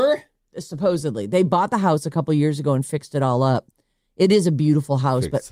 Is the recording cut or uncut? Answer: uncut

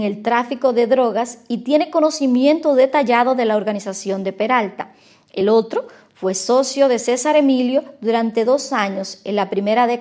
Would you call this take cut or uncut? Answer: uncut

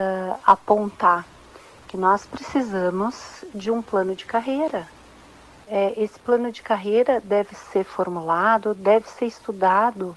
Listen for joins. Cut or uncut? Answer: uncut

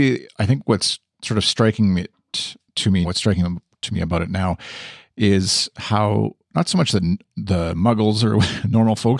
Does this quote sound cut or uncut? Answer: cut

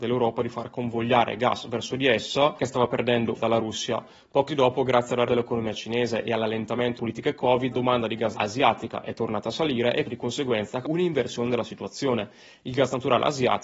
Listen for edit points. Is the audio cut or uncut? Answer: cut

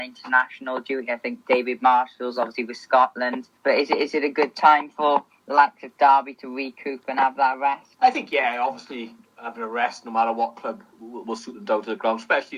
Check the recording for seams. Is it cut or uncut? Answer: cut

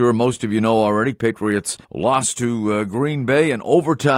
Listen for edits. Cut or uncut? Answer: cut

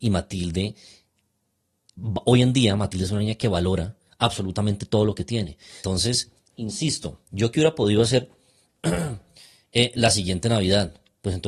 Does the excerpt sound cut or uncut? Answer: uncut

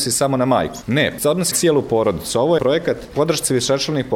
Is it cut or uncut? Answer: cut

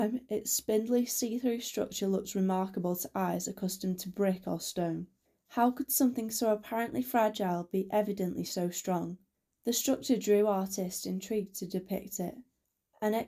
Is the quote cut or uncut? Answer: uncut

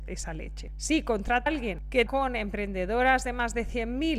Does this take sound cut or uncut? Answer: cut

